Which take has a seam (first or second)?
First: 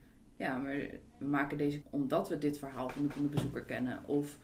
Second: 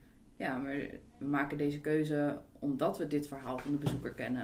first